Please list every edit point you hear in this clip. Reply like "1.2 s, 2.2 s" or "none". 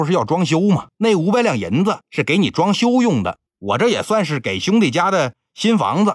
0.9 s, 2.0 s, 3.5 s

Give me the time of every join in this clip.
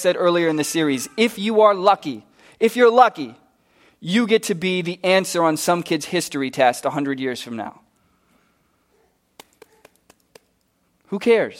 none

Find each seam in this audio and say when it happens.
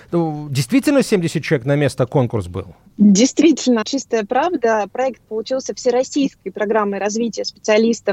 3.8 s, 5.2 s

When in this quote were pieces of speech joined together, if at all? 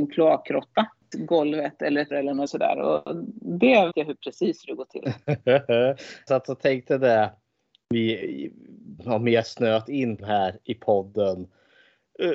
1.1 s, 2.1 s, 2.5 s, 3.9 s, 6.3 s, 9.0 s, 10.2 s

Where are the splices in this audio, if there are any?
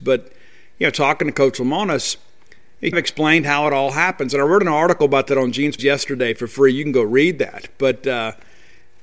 2.9 s, 5.8 s

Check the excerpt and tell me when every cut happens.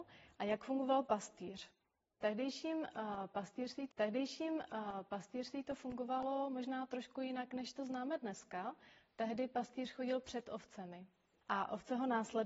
3.9 s

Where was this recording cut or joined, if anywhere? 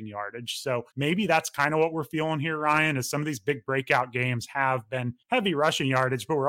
0.9 s, 5.2 s

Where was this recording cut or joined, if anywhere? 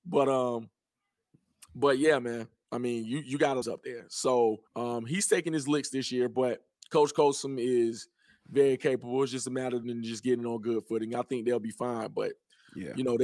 3.6 s, 4.7 s, 9.8 s

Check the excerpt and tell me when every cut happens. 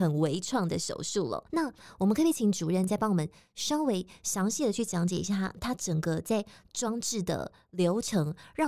1.5 s

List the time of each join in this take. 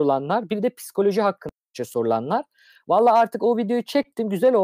none

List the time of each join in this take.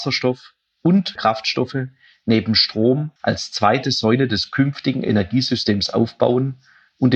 1.2 s, 3.2 s

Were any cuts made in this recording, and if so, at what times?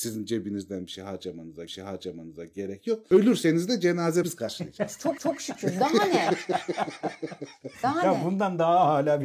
1.7 s, 4.2 s, 5.2 s

